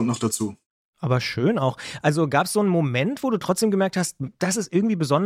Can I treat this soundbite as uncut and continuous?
yes; 0 cuts

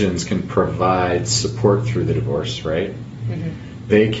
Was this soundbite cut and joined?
no; 0 cuts

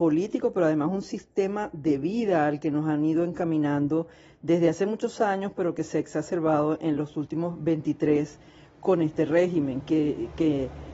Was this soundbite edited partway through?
no; 0 cuts

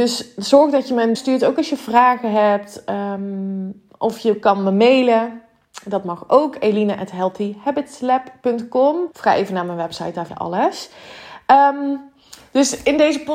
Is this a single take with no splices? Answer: no; 3 cuts; at 1.1 s, 9.1 s, 10.3 s

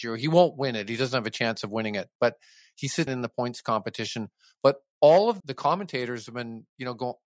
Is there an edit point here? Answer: yes; 2 cuts; at 3.1 s, 5.4 s

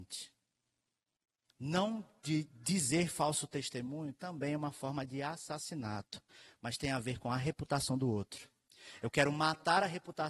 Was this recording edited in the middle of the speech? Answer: no; 0 cuts

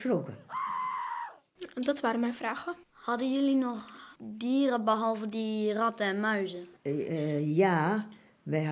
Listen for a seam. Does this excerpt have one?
yes; 3 cuts; at 2.8 s, 4.2 s, 6.8 s

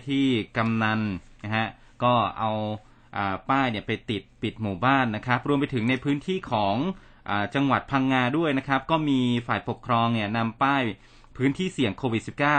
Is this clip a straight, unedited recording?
yes; 0 cuts

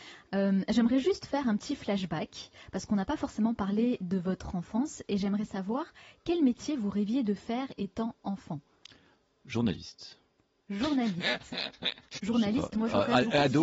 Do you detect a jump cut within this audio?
no; 0 cuts

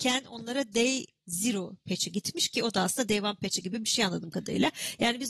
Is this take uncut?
yes; 0 cuts

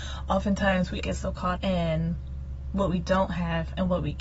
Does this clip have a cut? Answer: yes; 2 cuts; at 1.0 s, 1.6 s

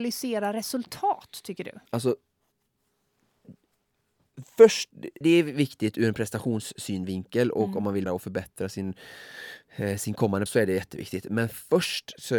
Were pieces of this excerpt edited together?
yes; 4 cuts; at 1.9 s, 5.2 s, 8.1 s, 10.5 s

